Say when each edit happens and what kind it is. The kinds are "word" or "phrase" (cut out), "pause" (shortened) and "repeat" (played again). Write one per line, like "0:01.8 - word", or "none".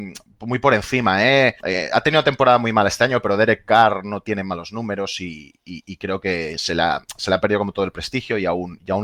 0:01.6 - pause